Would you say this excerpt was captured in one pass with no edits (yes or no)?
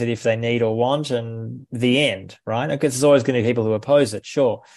yes